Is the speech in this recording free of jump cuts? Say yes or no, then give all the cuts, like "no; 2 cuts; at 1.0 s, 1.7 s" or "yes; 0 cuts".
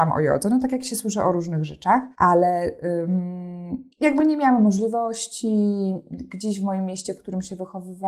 no; 2 cuts; at 2.1 s, 3.9 s